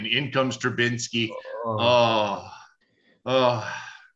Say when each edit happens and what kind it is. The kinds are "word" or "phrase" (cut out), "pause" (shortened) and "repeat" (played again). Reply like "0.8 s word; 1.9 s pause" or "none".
2.8 s pause